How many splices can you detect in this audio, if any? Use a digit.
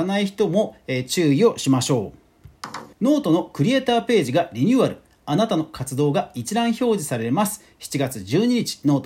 1